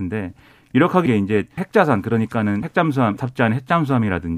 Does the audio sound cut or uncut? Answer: cut